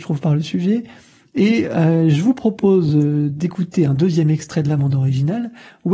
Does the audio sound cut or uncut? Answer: uncut